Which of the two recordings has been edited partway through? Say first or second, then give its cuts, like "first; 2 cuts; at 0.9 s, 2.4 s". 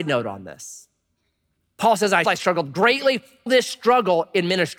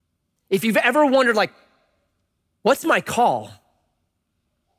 first; 2 cuts; at 2.2 s, 3.5 s